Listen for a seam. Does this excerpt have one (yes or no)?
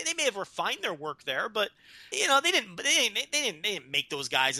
yes